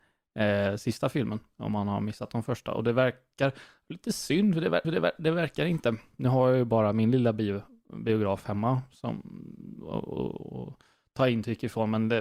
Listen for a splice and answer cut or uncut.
cut